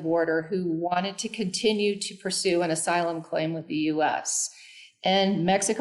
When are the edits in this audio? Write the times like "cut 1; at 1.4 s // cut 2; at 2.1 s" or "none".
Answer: none

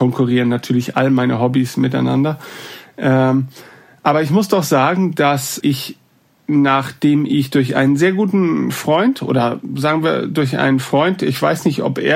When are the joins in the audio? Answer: cut 1; at 5.6 s

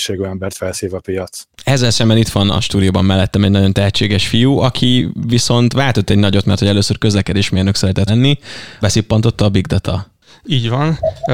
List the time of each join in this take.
cut 1; at 1.5 s // cut 2; at 8.1 s // cut 3; at 8.8 s

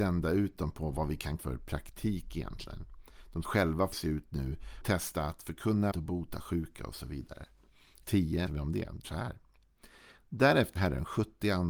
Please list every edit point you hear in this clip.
cut 1; at 1.4 s // cut 2; at 3.4 s // cut 3; at 3.9 s // cut 4; at 4.8 s // cut 5; at 5.9 s // cut 6; at 8.0 s // cut 7; at 8.5 s // cut 8; at 9.0 s // cut 9; at 10.8 s

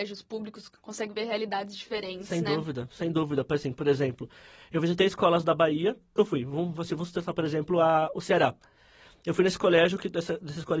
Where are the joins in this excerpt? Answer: cut 1; at 6.2 s

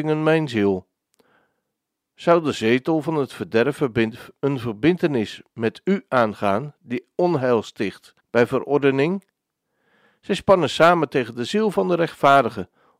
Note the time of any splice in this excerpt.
cut 1; at 8.2 s

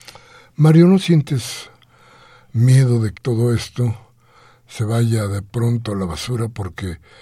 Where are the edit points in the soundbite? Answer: cut 1; at 3.1 s

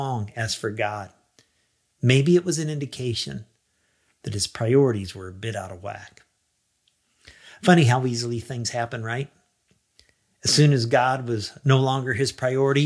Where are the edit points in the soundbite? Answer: none

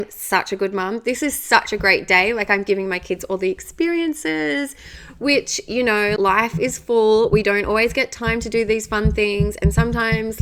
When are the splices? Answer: cut 1; at 6.2 s

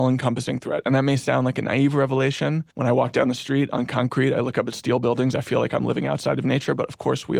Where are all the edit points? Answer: cut 1; at 2.7 s

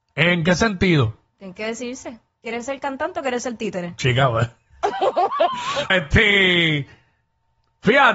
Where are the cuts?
cut 1; at 5.9 s

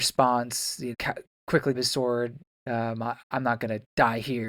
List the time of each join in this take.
cut 1; at 0.9 s // cut 2; at 1.7 s // cut 3; at 2.5 s // cut 4; at 3.2 s

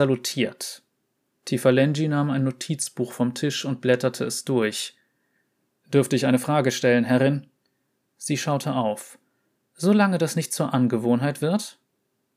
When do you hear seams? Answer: none

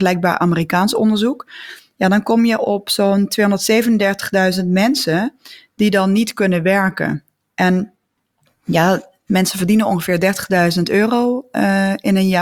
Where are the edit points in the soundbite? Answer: none

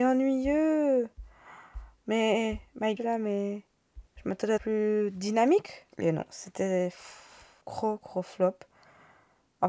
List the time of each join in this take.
cut 1; at 3.0 s // cut 2; at 4.1 s // cut 3; at 4.6 s // cut 4; at 5.9 s // cut 5; at 7.6 s

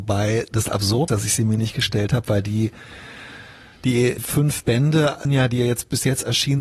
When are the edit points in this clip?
cut 1; at 1.1 s // cut 2; at 4.2 s // cut 3; at 5.2 s

